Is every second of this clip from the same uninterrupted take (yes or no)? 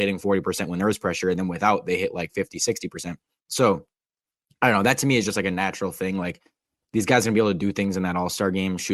yes